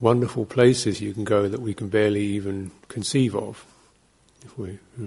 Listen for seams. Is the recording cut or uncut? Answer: cut